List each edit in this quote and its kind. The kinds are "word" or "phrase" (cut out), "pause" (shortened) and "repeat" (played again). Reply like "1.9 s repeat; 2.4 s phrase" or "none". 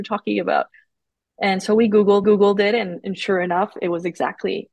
2.2 s repeat